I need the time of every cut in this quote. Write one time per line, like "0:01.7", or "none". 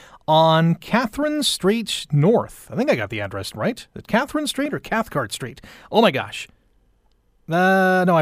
none